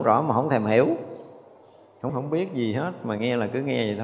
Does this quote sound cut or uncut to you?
cut